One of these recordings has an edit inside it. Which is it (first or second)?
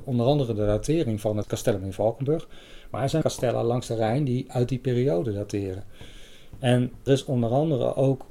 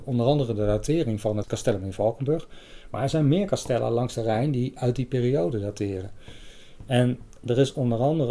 first